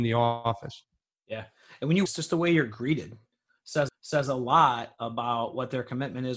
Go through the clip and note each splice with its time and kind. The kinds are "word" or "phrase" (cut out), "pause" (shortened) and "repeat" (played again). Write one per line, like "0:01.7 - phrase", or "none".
0:02.1 - phrase
0:03.9 - repeat